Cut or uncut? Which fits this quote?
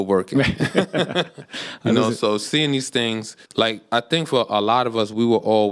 cut